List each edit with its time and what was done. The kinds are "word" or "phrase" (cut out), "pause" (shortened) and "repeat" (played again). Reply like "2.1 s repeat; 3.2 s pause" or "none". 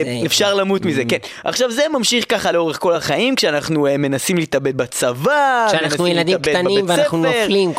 none